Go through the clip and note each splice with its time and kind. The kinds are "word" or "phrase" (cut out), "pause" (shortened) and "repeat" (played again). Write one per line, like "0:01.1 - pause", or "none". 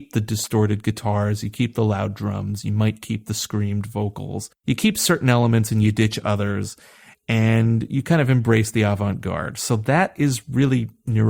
none